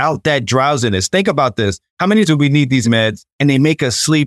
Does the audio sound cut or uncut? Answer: cut